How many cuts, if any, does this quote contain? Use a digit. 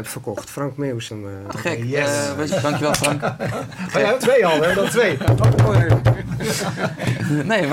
4